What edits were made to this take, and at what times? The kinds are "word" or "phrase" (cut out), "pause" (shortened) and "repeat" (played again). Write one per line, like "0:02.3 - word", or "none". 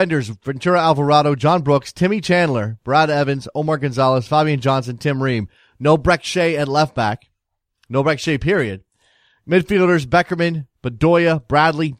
none